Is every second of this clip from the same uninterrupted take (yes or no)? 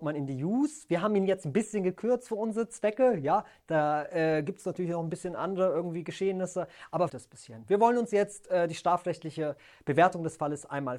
no